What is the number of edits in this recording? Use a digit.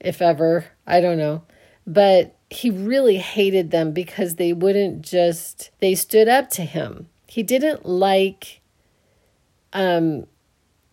3